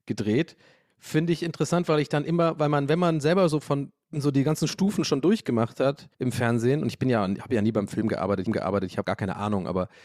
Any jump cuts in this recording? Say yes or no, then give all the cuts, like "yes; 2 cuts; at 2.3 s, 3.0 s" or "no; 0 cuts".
yes; 3 cuts; at 6.1 s, 8.5 s, 9.0 s